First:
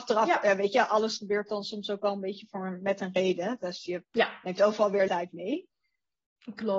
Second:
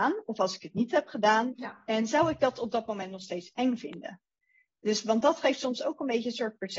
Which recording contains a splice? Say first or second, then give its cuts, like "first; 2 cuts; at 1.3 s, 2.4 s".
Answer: first; 1 cut; at 5.1 s